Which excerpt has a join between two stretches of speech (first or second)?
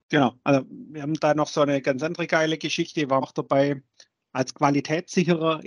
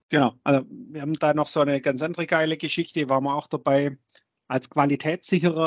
first